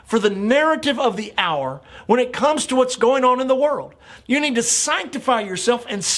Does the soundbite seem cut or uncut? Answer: uncut